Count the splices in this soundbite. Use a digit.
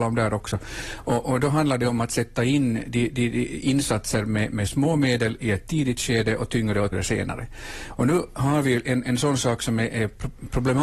2